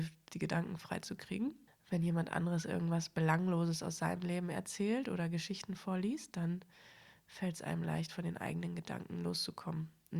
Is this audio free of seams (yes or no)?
yes